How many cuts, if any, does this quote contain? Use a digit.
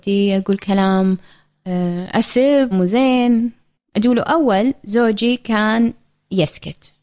1